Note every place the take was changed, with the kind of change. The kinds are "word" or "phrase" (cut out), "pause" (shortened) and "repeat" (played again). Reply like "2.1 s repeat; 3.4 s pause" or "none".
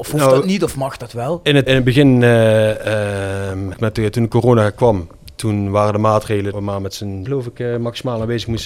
1.7 s word; 3.7 s word; 6.5 s word; 7.3 s word